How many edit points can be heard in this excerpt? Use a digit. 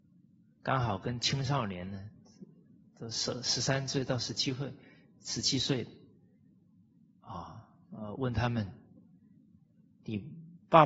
0